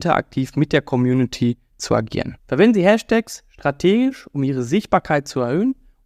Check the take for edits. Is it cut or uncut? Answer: cut